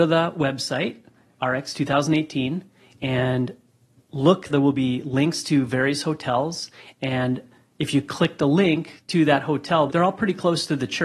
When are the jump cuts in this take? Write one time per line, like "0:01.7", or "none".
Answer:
0:04.5
0:09.9